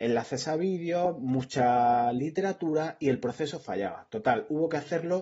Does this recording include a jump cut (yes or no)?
no